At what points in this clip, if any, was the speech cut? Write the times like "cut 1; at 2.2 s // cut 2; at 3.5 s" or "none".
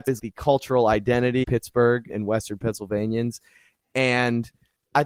cut 1; at 1.4 s